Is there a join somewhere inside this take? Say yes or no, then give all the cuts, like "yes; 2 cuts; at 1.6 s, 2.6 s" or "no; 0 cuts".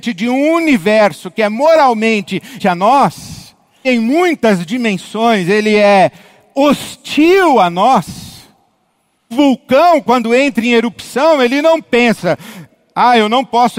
yes; 3 cuts; at 2.6 s, 3.8 s, 9.3 s